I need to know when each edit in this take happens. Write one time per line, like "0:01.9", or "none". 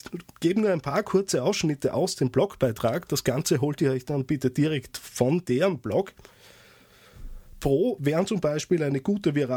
none